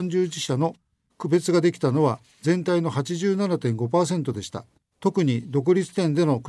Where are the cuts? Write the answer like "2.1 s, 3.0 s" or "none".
4.8 s